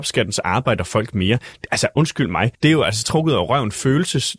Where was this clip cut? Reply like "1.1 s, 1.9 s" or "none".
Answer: 2.5 s, 3.0 s